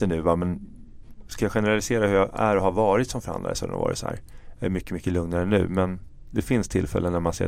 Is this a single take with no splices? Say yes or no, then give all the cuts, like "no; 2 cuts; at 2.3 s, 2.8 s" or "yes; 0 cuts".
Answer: yes; 0 cuts